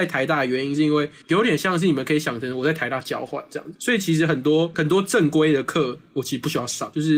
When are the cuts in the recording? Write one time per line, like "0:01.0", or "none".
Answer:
0:04.7